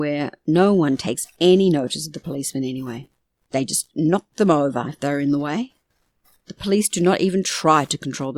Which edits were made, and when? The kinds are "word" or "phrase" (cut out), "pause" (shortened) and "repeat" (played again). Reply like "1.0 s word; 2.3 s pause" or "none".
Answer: none